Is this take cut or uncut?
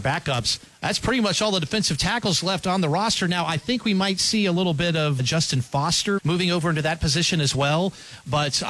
cut